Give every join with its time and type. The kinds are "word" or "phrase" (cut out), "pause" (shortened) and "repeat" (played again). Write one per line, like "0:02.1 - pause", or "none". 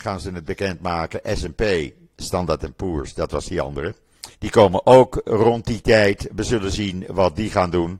0:04.3 - pause